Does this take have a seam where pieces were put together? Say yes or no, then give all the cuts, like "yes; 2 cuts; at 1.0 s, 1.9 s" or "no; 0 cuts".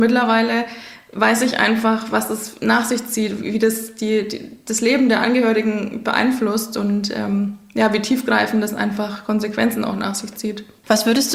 no; 0 cuts